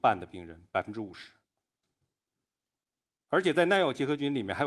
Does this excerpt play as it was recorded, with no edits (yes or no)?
yes